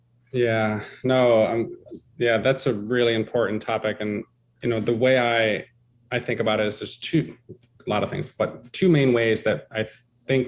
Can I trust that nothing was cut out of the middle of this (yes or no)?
yes